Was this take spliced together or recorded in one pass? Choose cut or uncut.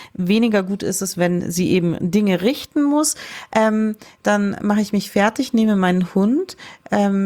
uncut